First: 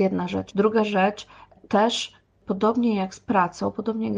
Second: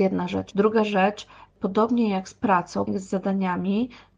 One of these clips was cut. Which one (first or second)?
second